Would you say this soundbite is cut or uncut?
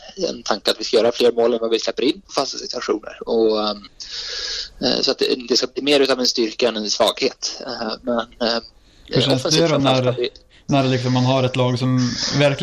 uncut